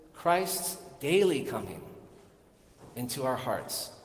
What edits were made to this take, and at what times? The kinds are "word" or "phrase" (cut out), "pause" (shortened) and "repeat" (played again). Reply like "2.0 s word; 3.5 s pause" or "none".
none